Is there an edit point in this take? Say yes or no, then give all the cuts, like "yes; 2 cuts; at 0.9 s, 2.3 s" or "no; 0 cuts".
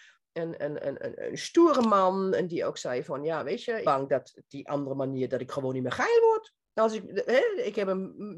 yes; 2 cuts; at 3.8 s, 6.6 s